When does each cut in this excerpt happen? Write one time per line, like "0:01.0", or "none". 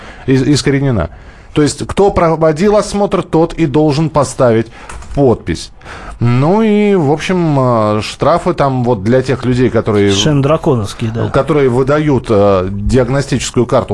none

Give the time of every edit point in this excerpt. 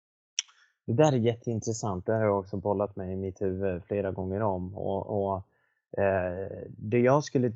none

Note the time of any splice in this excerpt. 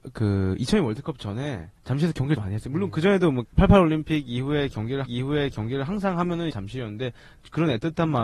0:01.8
0:02.4
0:03.4
0:05.0
0:06.5

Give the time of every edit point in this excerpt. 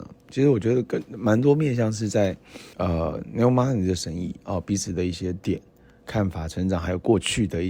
0:02.7

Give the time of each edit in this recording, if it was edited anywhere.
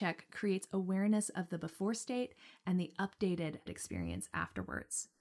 0:03.7

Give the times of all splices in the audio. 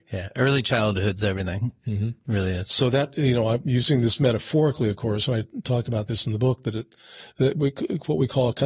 0:01.8

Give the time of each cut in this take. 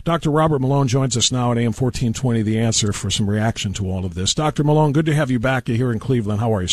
none

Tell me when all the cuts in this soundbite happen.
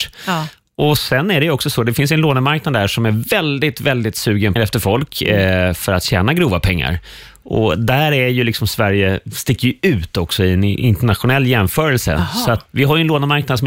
0:04.6
0:12.7

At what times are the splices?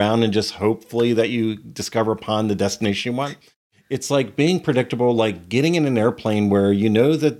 none

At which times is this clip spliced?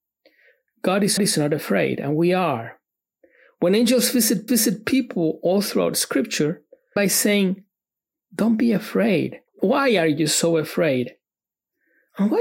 0:01.2
0:04.5
0:07.0
0:09.5

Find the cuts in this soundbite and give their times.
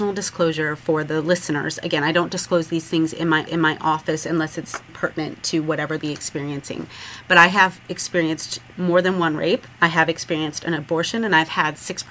0:03.5
0:04.9
0:06.0
0:09.7

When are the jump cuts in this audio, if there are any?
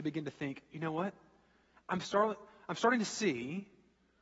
none

